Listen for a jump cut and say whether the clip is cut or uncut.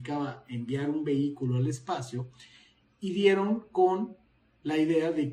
uncut